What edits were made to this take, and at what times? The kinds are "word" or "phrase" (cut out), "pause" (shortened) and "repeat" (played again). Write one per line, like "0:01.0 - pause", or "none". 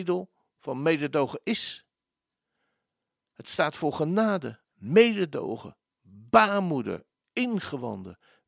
0:04.6 - pause